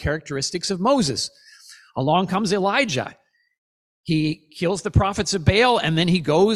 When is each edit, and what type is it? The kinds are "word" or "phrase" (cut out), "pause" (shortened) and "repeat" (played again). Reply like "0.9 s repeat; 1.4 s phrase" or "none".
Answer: none